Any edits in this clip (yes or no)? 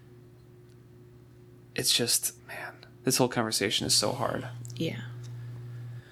yes